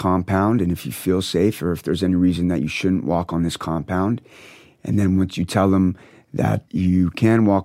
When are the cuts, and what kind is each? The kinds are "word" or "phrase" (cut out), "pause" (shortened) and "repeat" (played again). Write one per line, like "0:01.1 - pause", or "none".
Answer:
0:06.7 - word